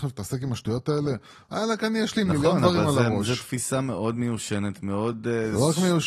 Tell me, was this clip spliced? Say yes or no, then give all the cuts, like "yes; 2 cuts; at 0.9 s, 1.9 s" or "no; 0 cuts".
no; 0 cuts